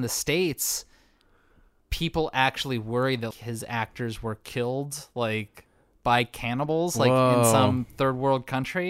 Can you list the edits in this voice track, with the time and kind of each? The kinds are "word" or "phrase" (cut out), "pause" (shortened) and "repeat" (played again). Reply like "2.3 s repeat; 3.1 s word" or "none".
3.3 s word